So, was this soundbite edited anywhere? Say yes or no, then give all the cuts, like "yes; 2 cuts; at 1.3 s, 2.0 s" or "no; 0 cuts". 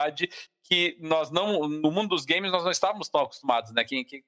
no; 0 cuts